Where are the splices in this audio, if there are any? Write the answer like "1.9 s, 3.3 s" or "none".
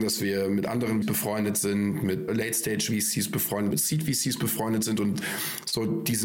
1.0 s, 2.3 s, 3.7 s

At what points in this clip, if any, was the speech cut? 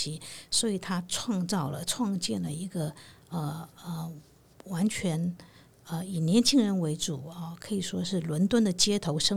none

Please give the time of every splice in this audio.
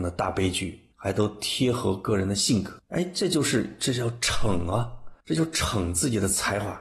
0.9 s, 5.2 s

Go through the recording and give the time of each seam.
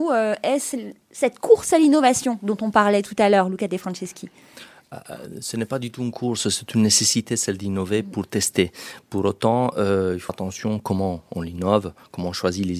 10.3 s

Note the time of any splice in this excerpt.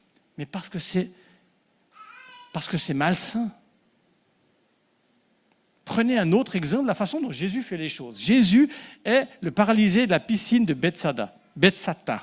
none

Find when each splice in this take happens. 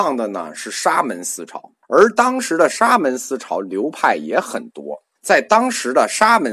1.8 s, 5.2 s

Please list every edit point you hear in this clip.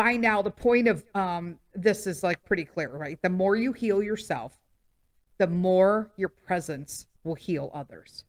7.2 s

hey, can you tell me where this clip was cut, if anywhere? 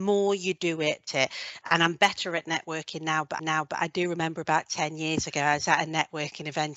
1.1 s, 3.4 s

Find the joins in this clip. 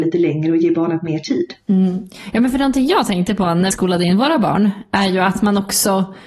3.7 s

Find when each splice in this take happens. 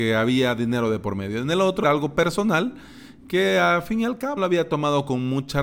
1.8 s, 4.4 s

